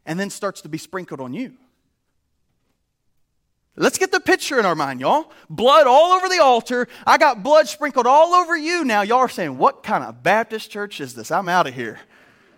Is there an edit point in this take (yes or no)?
no